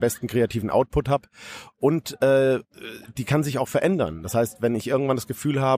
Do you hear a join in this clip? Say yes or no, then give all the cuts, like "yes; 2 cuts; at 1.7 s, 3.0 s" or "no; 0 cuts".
no; 0 cuts